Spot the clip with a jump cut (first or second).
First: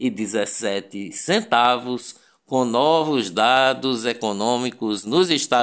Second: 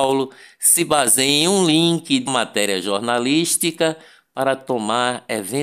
second